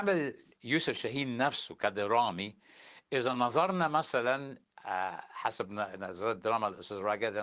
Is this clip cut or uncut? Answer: uncut